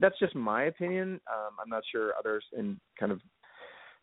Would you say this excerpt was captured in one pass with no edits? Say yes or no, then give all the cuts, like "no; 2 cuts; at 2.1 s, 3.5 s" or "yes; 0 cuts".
no; 1 cut; at 2.5 s